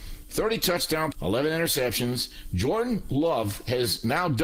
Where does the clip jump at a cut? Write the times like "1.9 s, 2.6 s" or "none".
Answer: 1.1 s